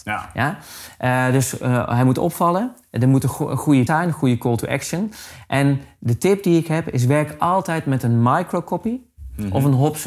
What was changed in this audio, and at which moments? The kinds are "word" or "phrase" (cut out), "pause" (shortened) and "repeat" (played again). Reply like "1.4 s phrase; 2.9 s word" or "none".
3.9 s phrase